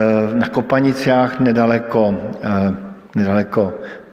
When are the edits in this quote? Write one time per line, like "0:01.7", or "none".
0:03.0